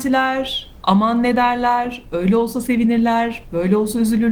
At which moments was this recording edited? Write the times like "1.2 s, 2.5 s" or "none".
none